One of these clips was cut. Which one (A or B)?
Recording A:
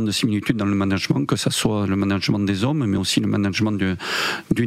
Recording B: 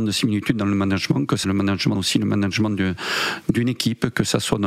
B